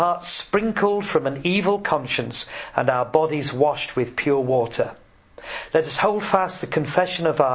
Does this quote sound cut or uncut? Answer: uncut